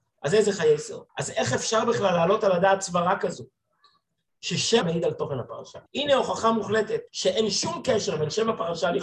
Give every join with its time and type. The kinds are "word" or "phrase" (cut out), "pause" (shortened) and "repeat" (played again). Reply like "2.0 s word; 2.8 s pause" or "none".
1.1 s pause; 4.8 s word; 5.9 s pause; 7.1 s pause

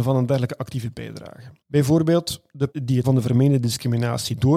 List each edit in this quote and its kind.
1.6 s pause; 2.7 s word; 3.0 s word

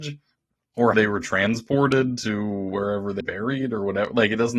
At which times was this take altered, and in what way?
0.9 s word; 3.2 s word

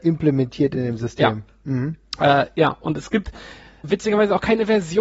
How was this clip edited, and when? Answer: none

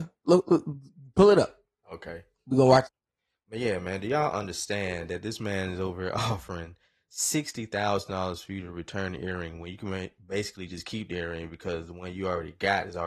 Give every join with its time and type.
none

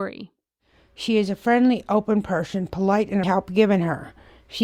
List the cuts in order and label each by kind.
3.2 s phrase

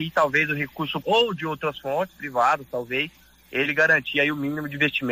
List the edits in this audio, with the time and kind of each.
1.0 s word

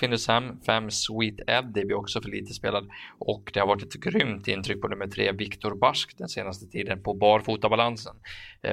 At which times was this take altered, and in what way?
none

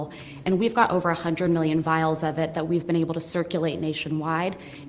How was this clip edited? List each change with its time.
none

